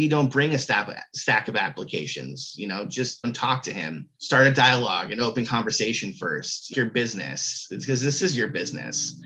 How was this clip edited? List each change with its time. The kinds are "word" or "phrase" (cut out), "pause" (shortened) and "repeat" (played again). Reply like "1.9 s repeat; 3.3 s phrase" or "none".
3.2 s word; 4.1 s pause; 6.7 s phrase